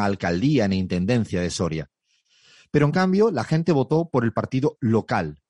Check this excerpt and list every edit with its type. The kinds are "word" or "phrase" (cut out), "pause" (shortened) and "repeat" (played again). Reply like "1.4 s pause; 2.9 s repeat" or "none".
none